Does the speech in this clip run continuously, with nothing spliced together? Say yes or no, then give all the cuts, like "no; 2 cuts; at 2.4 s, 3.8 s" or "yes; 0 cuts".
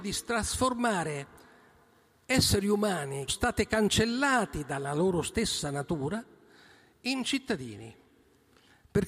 no; 1 cut; at 3.3 s